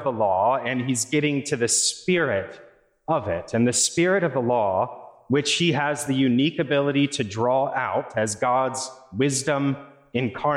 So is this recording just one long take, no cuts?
yes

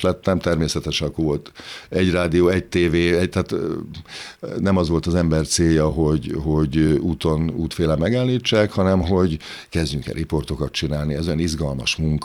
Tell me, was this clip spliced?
no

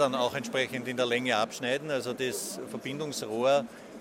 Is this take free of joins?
yes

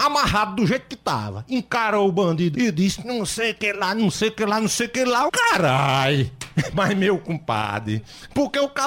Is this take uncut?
no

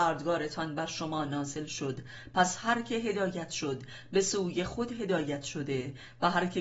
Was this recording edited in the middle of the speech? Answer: no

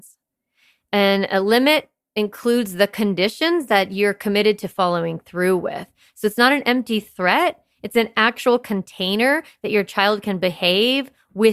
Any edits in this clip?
no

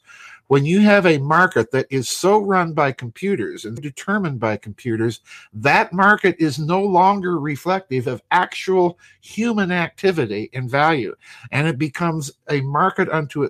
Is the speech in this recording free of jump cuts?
no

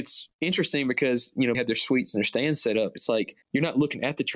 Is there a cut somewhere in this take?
yes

